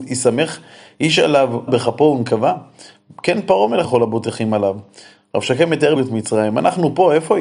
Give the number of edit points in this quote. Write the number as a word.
three